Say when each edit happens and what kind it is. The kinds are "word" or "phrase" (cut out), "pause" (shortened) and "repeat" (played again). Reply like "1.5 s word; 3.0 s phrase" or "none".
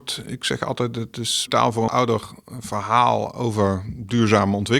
1.5 s phrase; 1.9 s phrase